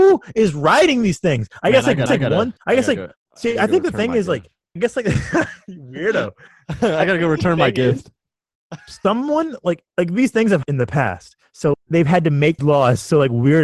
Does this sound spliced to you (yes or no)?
yes